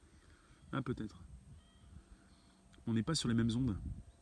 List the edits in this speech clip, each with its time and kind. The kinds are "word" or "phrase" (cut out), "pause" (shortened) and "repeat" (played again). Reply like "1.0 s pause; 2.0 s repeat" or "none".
none